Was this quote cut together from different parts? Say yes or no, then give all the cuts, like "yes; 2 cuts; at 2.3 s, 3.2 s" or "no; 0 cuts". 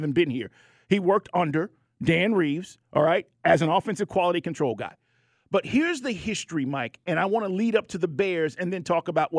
no; 0 cuts